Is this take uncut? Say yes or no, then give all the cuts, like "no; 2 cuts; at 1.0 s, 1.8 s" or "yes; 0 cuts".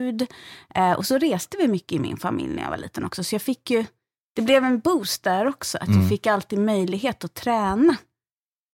yes; 0 cuts